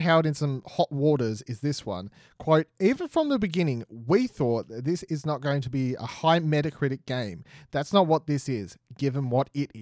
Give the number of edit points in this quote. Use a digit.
0